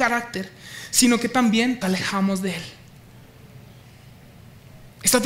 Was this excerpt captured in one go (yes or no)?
no